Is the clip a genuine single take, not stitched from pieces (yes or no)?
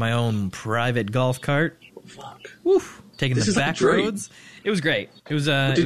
no